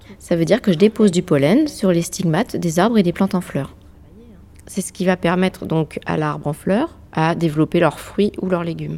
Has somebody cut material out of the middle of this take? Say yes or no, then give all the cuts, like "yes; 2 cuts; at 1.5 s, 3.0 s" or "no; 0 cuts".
no; 0 cuts